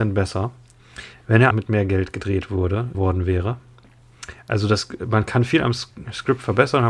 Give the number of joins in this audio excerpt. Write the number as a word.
two